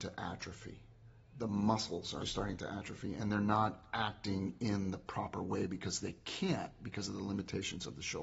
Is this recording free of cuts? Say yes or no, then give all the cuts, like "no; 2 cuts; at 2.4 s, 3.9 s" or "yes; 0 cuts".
no; 1 cut; at 2.2 s